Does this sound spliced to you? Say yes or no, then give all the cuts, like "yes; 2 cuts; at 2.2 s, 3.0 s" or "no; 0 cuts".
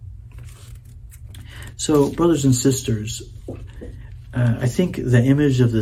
no; 0 cuts